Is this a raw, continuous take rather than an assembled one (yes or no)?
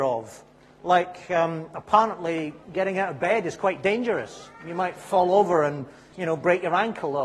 no